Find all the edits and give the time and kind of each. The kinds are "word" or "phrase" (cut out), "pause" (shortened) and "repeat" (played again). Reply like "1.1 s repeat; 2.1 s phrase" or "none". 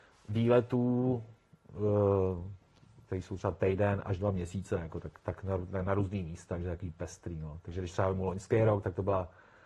5.2 s pause